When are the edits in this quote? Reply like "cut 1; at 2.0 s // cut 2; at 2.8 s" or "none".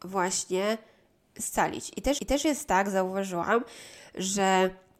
cut 1; at 1.2 s // cut 2; at 2.2 s